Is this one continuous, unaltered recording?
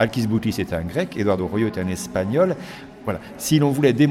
yes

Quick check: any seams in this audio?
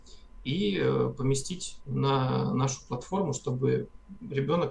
no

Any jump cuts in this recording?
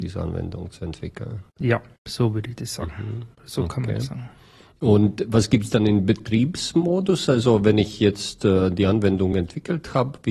no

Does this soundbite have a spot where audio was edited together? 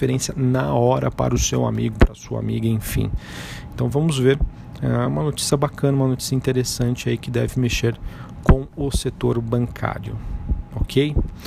no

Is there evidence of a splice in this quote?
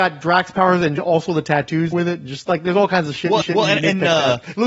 yes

